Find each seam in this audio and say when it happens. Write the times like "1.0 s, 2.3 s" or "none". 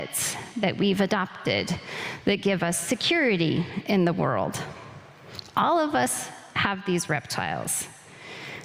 none